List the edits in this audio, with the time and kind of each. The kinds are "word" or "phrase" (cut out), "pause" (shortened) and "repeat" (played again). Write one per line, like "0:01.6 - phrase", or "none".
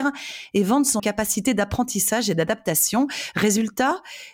0:01.0 - word